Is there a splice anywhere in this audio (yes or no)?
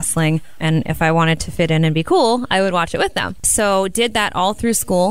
no